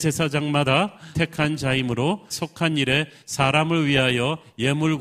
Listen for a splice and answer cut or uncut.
cut